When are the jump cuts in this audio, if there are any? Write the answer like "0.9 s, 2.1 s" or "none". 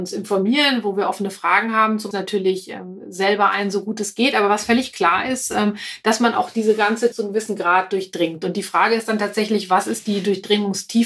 2.1 s, 7.1 s